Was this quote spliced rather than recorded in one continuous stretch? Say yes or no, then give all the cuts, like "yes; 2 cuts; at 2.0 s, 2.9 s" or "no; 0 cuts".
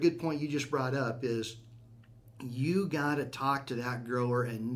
no; 0 cuts